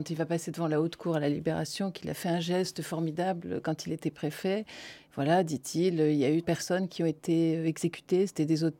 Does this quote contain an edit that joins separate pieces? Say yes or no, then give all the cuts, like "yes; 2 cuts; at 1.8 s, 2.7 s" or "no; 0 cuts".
yes; 1 cut; at 6.4 s